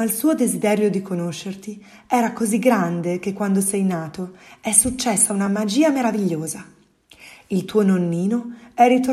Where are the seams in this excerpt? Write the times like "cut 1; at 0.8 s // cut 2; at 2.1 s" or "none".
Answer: none